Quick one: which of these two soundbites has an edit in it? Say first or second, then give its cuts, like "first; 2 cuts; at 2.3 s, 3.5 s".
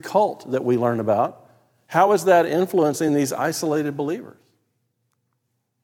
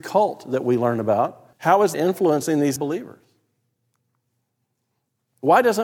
second; 3 cuts; at 1.5 s, 1.9 s, 2.8 s